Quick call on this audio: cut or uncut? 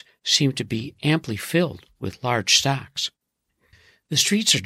uncut